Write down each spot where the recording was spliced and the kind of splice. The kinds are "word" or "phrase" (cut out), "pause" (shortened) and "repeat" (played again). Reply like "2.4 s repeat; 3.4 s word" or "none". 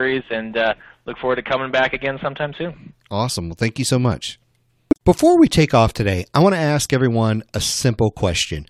none